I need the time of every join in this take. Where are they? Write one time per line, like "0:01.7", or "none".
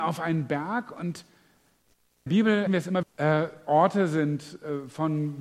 0:02.3
0:02.7
0:03.0